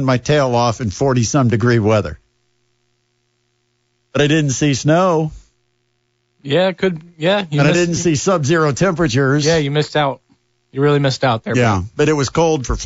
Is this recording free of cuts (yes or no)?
yes